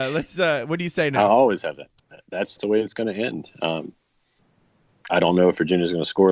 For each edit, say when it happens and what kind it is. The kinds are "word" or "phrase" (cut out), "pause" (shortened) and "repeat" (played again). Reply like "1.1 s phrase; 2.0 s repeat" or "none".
2.0 s pause; 2.6 s phrase; 5.1 s word